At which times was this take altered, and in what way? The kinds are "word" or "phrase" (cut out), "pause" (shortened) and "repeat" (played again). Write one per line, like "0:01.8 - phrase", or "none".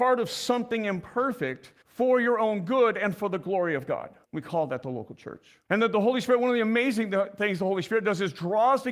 0:01.8 - pause
0:04.2 - pause
0:05.7 - pause